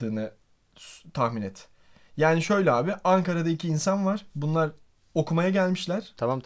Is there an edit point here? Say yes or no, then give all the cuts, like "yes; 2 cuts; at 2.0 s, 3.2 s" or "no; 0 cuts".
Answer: no; 0 cuts